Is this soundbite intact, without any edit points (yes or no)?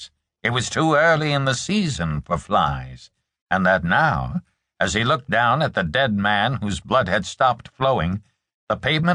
yes